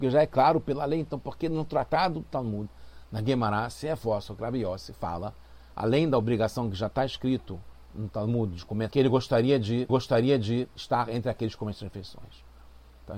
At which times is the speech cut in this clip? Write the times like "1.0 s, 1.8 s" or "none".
8.9 s, 9.9 s